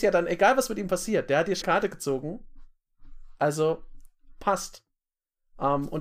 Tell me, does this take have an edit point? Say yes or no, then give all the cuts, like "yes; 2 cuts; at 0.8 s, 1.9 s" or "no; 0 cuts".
yes; 1 cut; at 1.6 s